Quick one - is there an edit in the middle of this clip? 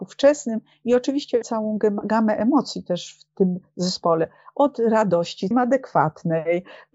yes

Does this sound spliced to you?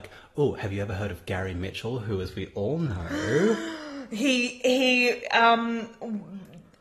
no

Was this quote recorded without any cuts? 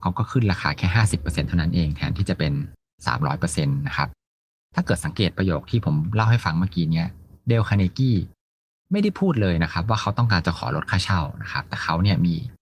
yes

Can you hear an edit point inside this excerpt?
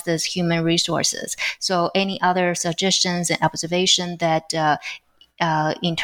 no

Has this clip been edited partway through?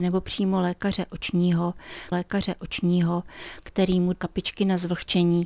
yes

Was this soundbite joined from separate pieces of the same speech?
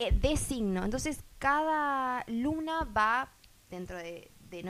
no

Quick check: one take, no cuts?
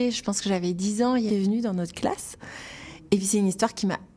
no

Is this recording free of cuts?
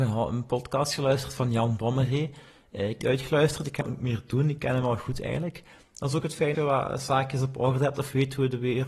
no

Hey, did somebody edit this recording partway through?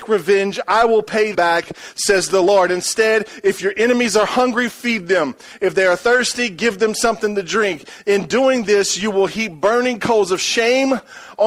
yes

